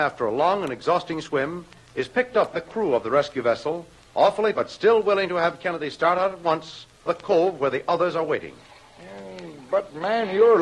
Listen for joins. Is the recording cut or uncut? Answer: cut